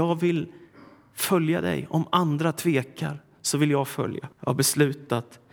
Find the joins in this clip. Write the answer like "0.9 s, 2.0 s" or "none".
4.3 s

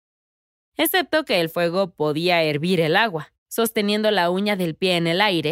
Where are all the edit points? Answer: 3.4 s

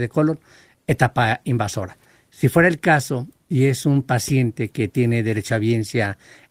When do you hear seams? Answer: none

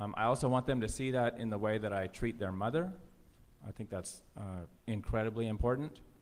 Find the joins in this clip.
4.8 s

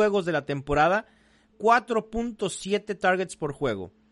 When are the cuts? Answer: 1.5 s

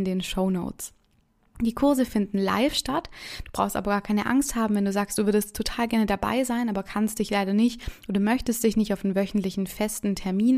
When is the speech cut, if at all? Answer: none

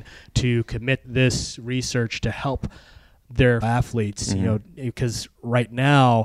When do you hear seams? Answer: 1.0 s, 3.6 s

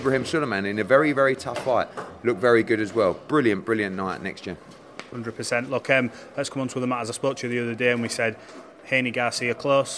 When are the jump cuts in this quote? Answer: none

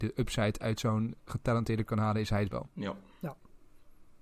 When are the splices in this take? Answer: 1.9 s, 2.5 s

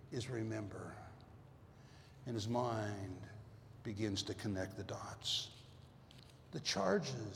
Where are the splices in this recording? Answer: none

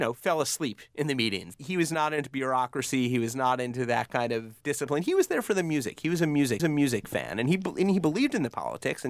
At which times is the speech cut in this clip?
6.6 s

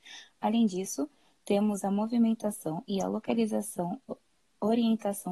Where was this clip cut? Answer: none

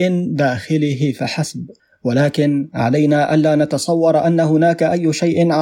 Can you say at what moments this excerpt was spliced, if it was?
1.8 s

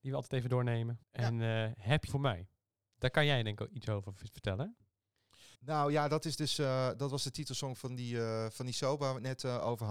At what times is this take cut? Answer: 1.0 s, 2.1 s, 5.5 s

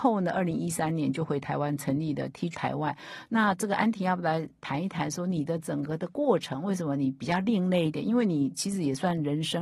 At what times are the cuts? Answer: 2.5 s

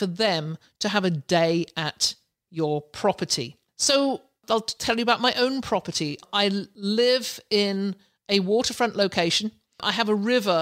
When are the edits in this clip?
none

